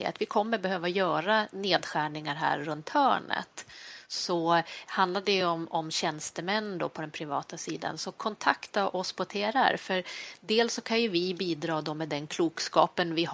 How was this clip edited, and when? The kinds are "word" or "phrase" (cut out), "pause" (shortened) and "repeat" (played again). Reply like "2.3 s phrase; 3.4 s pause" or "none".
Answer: none